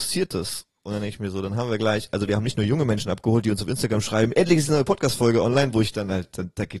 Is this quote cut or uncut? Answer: uncut